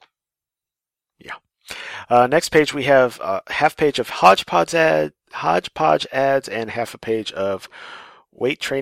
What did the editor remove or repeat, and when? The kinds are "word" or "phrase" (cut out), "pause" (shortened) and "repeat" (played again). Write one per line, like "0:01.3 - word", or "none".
none

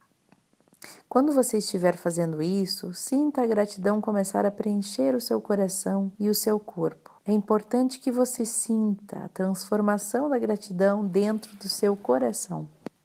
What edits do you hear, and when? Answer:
0:06.1 - pause
0:07.2 - pause
0:08.4 - word

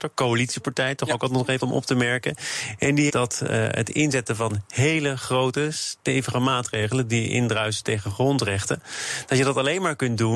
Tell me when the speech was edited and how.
0:01.6 - word
0:03.1 - phrase

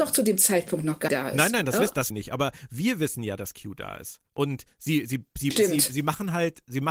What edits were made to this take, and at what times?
0:01.1 - phrase
0:02.1 - phrase
0:04.3 - pause
0:05.5 - phrase

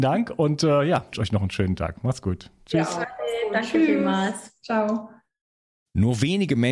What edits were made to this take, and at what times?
0:01.1 - word

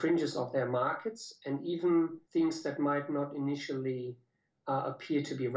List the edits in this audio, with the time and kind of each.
0:02.2 - pause

